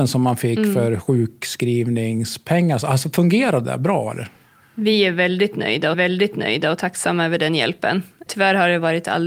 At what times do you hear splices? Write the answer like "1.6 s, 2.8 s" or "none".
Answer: 3.6 s, 5.9 s